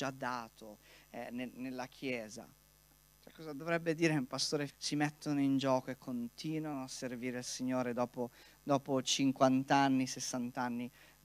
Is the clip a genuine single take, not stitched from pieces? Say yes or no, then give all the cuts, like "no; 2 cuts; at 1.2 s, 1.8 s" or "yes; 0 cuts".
no; 1 cut; at 4.7 s